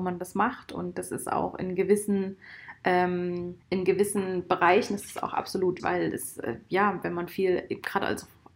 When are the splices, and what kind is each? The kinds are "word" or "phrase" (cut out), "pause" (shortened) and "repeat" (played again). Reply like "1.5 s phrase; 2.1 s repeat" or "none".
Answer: 3.6 s pause; 5.8 s word